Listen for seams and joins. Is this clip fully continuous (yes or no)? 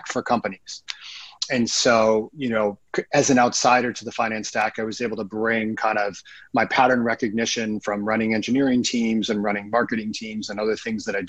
yes